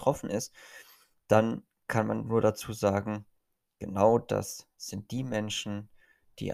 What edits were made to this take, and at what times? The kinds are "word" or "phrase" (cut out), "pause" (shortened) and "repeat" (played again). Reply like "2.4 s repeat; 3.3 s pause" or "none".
none